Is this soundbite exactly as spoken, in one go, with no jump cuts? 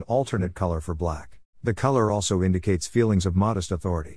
no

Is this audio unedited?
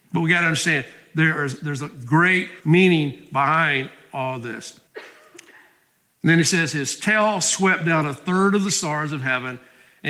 no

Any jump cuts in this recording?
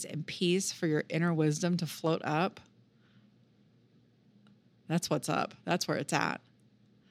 no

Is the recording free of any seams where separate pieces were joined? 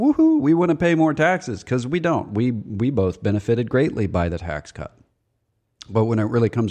yes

